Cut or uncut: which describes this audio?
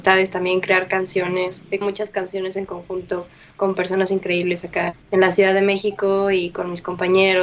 cut